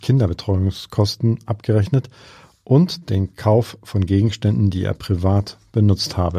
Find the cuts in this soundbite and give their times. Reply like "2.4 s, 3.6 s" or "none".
none